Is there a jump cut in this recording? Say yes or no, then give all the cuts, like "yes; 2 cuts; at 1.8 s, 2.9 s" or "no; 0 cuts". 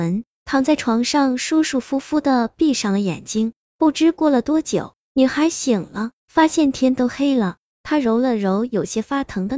yes; 1 cut; at 6.2 s